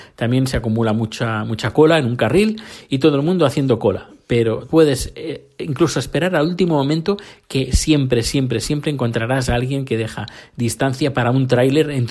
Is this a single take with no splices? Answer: no; 1 cut; at 4.7 s

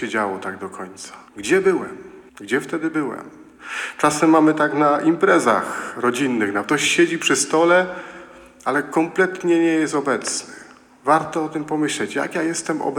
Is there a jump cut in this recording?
yes; 3 cuts; at 1.3 s, 2.3 s, 6.6 s

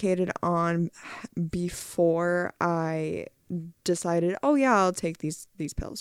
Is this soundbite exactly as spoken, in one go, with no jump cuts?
yes; 0 cuts

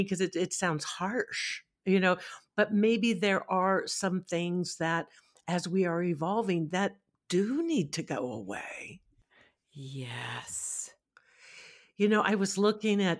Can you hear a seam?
no; 0 cuts

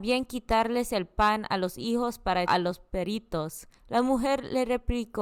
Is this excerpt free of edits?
no; 2 cuts; at 2.5 s, 3.8 s

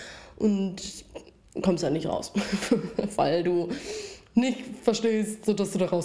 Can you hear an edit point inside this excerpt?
no; 0 cuts

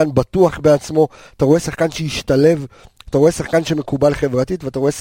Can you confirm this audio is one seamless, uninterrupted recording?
yes; 0 cuts

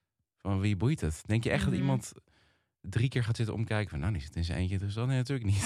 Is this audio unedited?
yes; 0 cuts

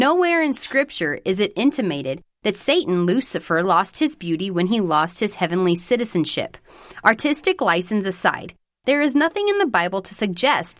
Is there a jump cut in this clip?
no; 0 cuts

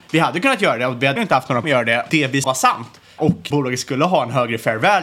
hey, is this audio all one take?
no; 6 cuts; at 1.2 s, 1.6 s, 2.1 s, 2.4 s, 3.2 s, 3.5 s

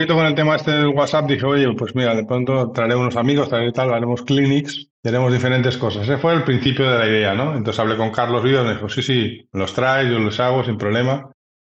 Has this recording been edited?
yes; 1 cut; at 4.9 s

